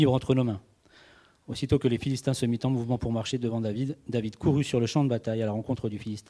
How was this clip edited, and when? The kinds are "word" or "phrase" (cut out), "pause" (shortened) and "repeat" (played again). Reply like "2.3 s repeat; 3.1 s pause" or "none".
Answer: none